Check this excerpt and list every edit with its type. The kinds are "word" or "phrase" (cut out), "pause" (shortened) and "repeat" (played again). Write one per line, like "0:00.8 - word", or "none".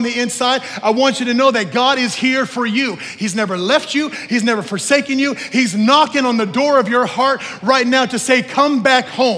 none